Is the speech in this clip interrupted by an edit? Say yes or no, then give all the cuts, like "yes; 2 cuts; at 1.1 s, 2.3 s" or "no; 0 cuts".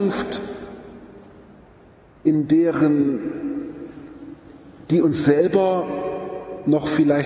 no; 0 cuts